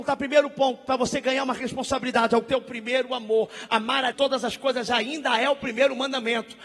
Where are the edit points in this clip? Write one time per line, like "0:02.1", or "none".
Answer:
0:04.1